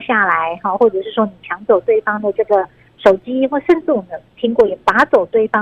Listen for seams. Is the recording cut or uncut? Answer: uncut